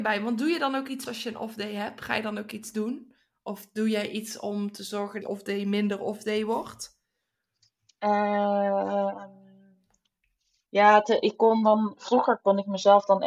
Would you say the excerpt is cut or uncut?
cut